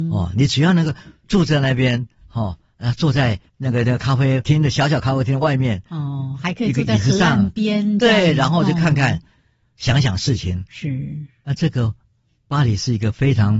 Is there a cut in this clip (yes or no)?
no